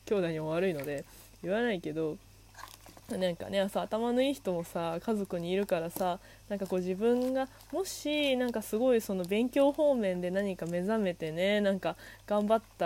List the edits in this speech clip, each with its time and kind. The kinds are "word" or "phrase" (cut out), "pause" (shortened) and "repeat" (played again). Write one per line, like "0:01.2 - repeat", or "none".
0:03.0 - pause